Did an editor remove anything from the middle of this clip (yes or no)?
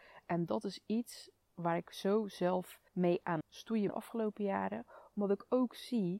yes